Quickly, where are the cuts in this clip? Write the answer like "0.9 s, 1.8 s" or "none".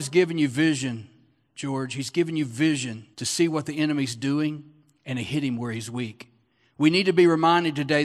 3.1 s

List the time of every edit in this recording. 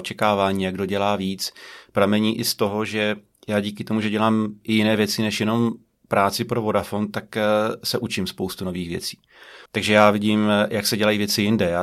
9.7 s

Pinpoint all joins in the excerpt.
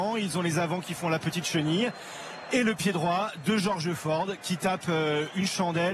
none

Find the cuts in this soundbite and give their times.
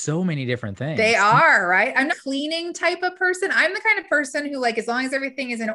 2.1 s

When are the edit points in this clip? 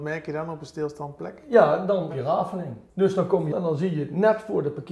2.1 s, 2.9 s, 3.5 s

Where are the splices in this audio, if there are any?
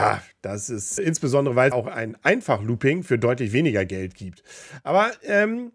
1.0 s, 1.7 s

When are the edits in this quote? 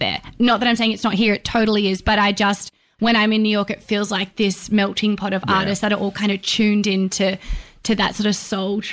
none

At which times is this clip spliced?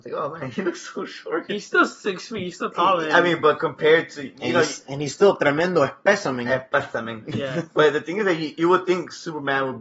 none

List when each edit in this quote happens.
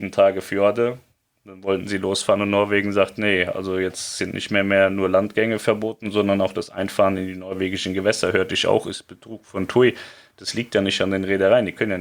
none

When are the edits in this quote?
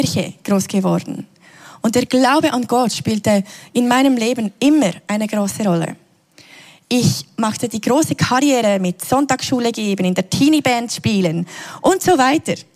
none

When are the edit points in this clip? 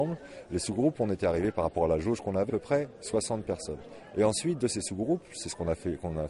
2.5 s

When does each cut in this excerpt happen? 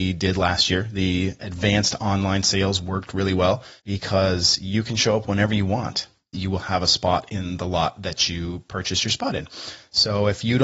3.8 s, 6.3 s

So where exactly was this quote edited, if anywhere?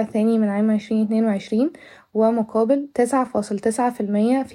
none

